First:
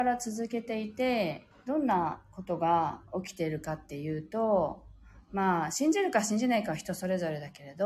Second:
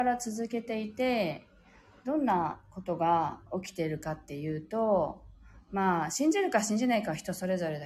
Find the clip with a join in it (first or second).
first